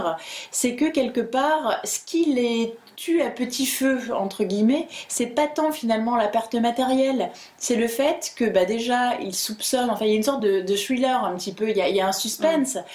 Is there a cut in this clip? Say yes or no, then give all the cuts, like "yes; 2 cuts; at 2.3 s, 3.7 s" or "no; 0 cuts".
no; 0 cuts